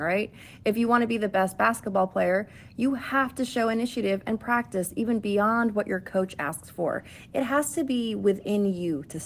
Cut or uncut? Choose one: uncut